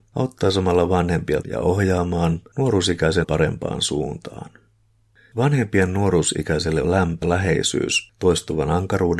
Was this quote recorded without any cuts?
no; 4 cuts; at 1.4 s, 3.2 s, 6.8 s, 7.2 s

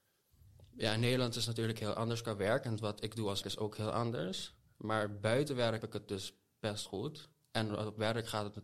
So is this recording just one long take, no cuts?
no; 3 cuts; at 3.4 s, 5.8 s, 6.9 s

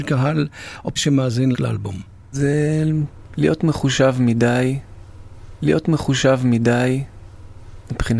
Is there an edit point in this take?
yes; 3 cuts; at 1.0 s, 1.5 s, 5.6 s

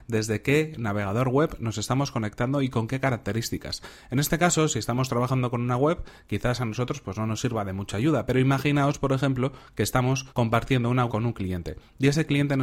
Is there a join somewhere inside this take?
yes; 2 cuts; at 10.3 s, 11.1 s

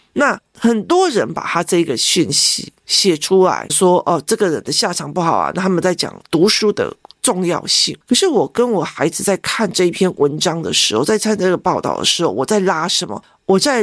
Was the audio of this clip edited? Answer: yes; 1 cut; at 3.7 s

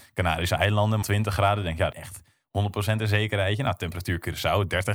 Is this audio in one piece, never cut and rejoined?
no; 2 cuts; at 1.0 s, 1.9 s

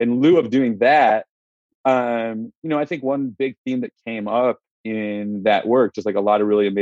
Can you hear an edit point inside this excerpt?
no; 0 cuts

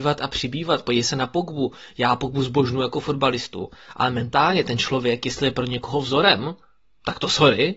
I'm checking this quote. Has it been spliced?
no; 0 cuts

